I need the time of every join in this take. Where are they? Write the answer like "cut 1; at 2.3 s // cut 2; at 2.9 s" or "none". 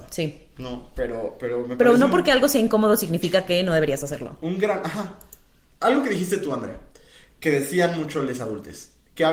none